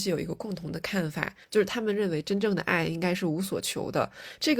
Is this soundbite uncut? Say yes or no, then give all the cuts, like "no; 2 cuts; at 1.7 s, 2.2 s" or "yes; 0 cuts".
no; 1 cut; at 1.4 s